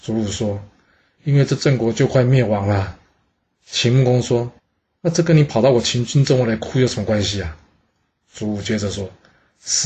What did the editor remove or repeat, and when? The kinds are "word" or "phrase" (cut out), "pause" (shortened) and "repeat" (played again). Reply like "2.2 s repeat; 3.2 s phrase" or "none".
4.6 s pause